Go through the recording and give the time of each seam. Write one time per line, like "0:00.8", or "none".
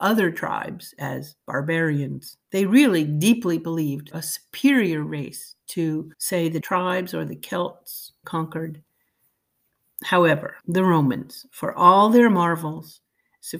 0:02.4
0:04.1
0:06.1
0:06.6
0:08.2
0:10.6